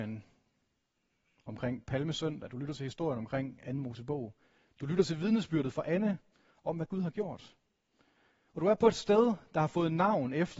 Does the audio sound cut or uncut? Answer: uncut